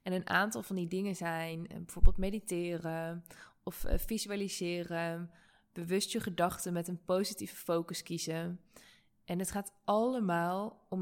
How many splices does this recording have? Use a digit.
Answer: 0